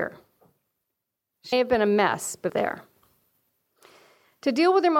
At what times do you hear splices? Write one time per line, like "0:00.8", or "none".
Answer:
0:01.5
0:02.5